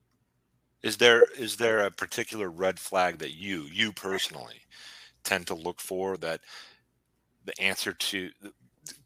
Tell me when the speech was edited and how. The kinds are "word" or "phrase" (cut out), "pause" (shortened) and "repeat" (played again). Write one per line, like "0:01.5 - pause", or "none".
none